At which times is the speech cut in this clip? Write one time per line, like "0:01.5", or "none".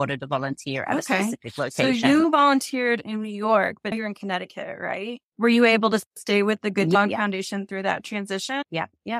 0:03.9
0:05.3
0:06.1

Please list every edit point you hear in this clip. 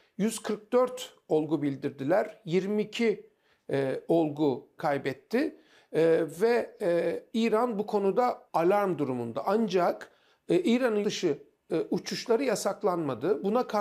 0:04.8
0:08.5
0:11.0

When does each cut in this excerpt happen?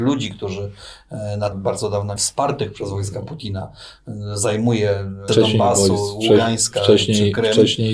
0:01.5
0:02.2
0:05.3

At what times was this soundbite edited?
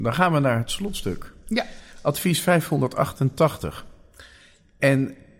none

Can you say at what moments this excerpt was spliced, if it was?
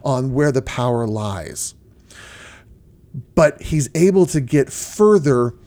0:03.3

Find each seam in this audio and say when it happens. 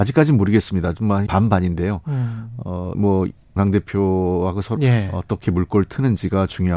0:01.3
0:02.9
0:03.6
0:04.8

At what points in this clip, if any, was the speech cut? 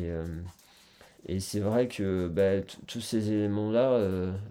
0:01.2

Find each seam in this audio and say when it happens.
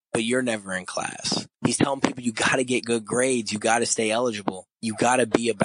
0:01.5
0:04.7

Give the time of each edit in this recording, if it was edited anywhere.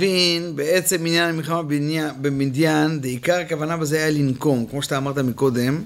none

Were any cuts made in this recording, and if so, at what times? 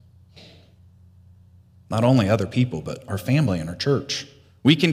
none

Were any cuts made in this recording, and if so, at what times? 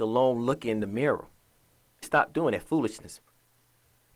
0:02.0

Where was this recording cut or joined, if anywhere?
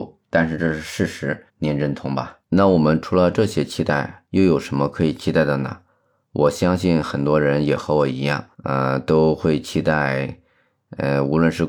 0:01.5
0:02.4
0:04.3
0:08.5

